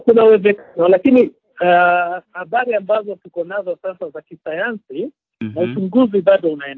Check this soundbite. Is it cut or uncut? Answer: uncut